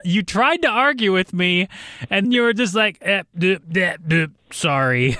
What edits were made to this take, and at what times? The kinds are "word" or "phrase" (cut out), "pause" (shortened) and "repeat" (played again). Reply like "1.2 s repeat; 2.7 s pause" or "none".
2.2 s word